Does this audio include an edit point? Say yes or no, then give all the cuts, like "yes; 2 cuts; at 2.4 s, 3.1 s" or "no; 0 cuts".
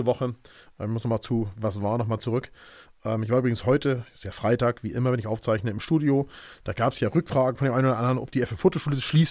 no; 0 cuts